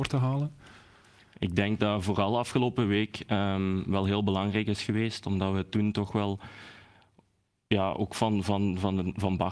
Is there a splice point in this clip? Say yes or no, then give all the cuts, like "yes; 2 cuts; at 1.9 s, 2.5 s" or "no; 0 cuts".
no; 0 cuts